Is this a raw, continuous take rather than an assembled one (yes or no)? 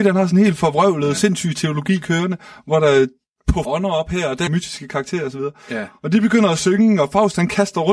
no